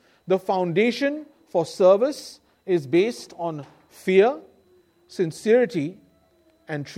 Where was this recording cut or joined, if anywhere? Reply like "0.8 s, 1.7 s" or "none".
none